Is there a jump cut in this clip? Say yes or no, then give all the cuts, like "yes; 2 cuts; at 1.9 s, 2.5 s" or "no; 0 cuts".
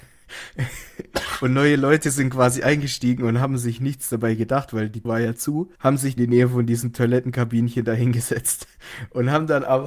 yes; 3 cuts; at 5.0 s, 5.8 s, 6.2 s